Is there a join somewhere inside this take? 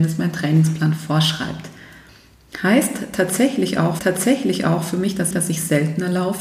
yes; 2 cuts; at 4.0 s, 5.3 s

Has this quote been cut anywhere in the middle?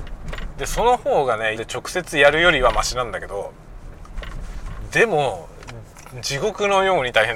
yes; 1 cut; at 1.6 s

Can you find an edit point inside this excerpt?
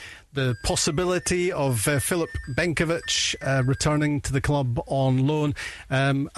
no; 0 cuts

